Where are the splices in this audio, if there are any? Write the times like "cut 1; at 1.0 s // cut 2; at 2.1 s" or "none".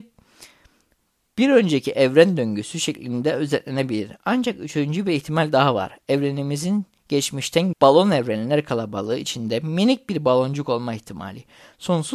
cut 1; at 7.7 s